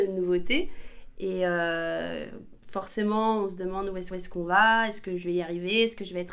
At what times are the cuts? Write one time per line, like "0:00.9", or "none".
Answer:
0:02.6
0:04.1